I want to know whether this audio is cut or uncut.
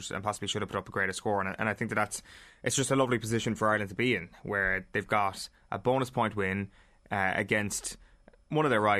uncut